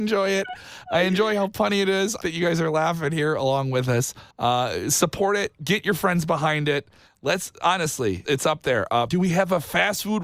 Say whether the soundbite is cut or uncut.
cut